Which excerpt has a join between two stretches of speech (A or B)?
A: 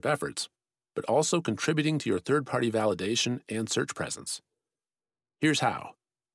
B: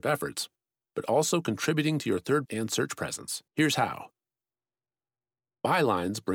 B